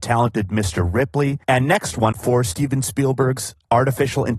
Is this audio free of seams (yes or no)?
no